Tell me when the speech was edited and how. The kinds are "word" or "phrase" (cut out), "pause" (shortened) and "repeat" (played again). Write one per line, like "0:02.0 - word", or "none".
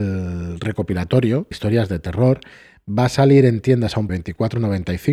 0:01.5 - word
0:04.1 - word